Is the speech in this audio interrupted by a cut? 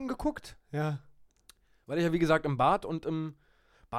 no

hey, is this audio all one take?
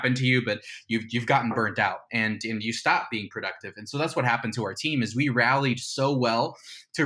yes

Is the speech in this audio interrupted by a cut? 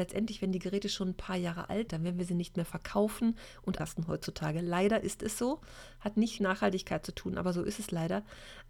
yes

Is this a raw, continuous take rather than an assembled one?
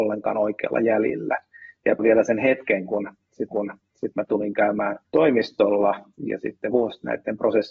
no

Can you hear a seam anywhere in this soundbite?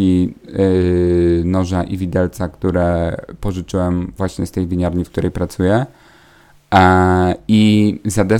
no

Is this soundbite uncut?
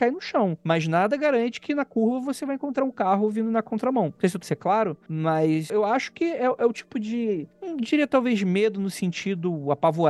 no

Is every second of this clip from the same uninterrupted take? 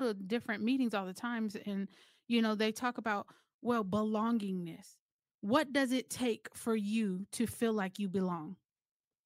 yes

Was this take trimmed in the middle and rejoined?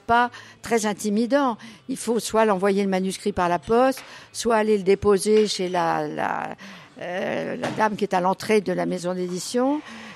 no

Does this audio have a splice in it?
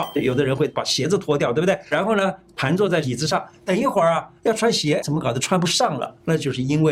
yes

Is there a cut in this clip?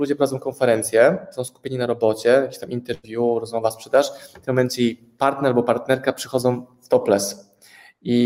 no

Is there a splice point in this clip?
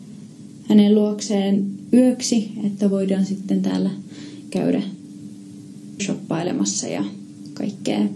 yes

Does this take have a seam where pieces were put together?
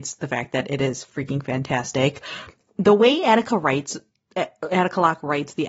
no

